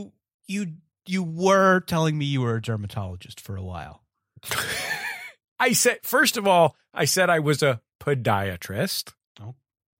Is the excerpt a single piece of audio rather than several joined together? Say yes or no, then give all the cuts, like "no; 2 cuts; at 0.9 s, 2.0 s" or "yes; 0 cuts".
yes; 0 cuts